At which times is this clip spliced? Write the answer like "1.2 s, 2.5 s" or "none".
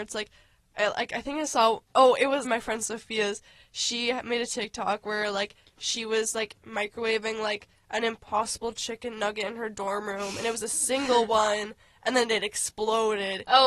2.4 s